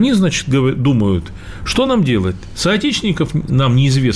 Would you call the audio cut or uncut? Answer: uncut